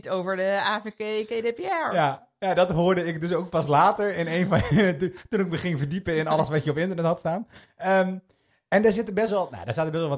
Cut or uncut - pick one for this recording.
uncut